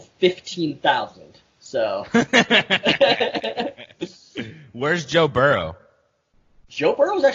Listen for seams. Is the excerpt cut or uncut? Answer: uncut